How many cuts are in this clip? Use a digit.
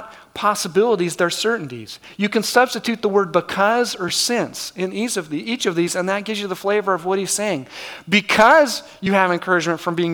0